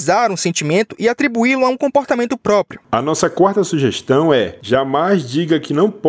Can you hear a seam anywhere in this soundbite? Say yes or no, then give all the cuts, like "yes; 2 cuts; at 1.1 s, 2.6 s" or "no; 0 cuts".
no; 0 cuts